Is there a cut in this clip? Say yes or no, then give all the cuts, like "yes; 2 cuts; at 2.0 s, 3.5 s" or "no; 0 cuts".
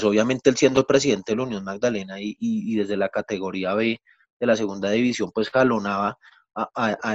no; 0 cuts